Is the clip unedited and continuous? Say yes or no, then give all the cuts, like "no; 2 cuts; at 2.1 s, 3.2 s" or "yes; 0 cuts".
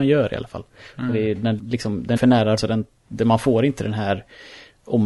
no; 3 cuts; at 1.6 s, 2.2 s, 2.6 s